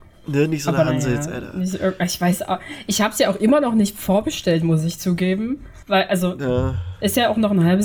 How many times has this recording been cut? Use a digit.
1